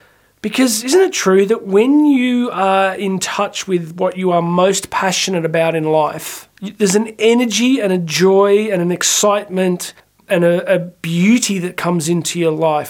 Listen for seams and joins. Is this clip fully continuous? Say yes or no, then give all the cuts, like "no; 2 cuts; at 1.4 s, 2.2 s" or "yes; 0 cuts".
no; 2 cuts; at 6.5 s, 10.0 s